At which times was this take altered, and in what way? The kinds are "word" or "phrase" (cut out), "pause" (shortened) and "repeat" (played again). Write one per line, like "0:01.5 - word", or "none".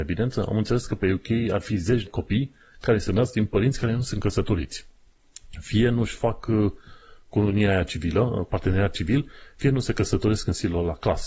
0:02.1 - phrase
0:08.5 - word